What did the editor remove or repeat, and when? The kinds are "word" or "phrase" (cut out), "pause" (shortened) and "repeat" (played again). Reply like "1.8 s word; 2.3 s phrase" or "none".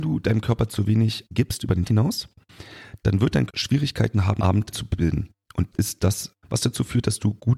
1.3 s word; 1.8 s word; 3.5 s word; 4.4 s word; 4.7 s word; 5.7 s word; 6.4 s word

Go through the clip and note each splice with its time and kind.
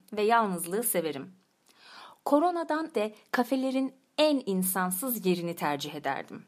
2.9 s word

